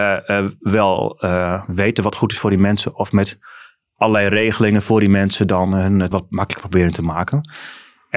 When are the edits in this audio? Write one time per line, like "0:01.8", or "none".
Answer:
0:06.1